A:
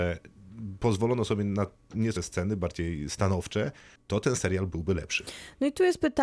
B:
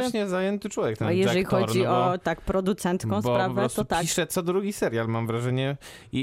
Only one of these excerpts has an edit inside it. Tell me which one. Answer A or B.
A